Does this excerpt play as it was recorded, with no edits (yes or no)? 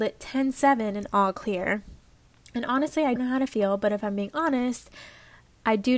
no